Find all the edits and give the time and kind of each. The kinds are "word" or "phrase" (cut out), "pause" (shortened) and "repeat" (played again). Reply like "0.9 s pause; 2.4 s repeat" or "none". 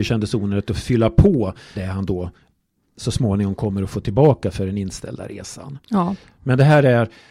1.7 s word